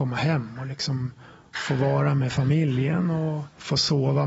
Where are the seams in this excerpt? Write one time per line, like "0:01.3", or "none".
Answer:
none